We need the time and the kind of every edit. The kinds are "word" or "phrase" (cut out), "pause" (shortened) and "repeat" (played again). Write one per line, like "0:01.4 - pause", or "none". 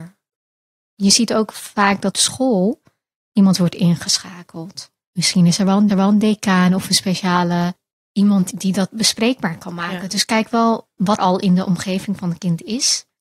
0:02.1 - word
0:05.9 - repeat
0:11.2 - word